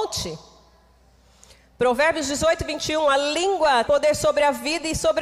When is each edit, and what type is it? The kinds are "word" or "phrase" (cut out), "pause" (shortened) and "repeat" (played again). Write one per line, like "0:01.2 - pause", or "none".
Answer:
0:03.9 - word